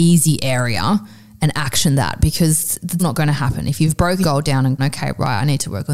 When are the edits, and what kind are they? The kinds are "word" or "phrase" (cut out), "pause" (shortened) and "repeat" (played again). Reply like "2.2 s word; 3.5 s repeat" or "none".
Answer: 3.0 s word; 4.2 s word; 4.8 s word